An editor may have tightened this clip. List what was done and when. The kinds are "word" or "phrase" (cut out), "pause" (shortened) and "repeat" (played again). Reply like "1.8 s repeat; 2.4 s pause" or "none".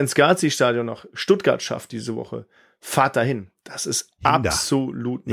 none